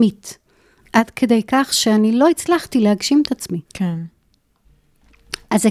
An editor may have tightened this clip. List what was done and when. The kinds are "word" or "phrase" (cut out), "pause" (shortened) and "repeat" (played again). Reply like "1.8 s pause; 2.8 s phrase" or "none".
3.7 s pause